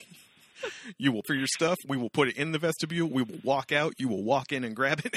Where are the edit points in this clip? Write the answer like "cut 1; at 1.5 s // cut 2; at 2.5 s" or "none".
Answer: cut 1; at 1.2 s